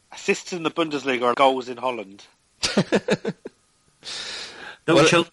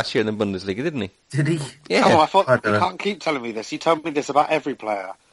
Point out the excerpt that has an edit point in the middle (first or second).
first